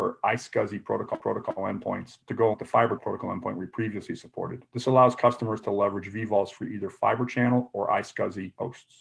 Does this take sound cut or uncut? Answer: cut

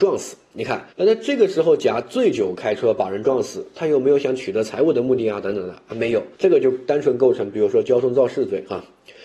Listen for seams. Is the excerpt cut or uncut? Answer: cut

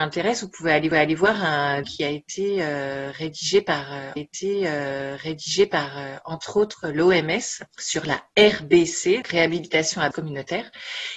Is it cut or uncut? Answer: cut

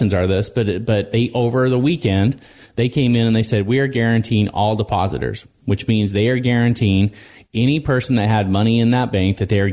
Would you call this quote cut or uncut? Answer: uncut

